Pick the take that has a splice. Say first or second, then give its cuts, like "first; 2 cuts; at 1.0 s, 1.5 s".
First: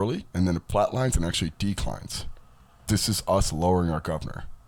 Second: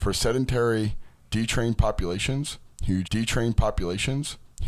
second; 1 cut; at 3.0 s